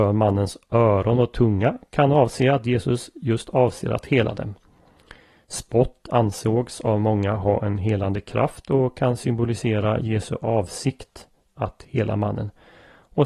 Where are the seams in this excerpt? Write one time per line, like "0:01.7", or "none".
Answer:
none

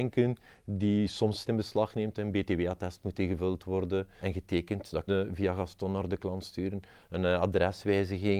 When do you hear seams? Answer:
0:01.4
0:04.2
0:05.1

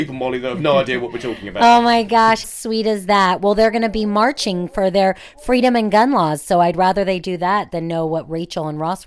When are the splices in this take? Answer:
0:02.4

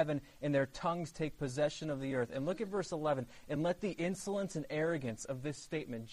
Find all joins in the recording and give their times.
none

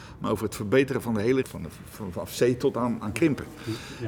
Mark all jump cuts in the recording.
0:01.4

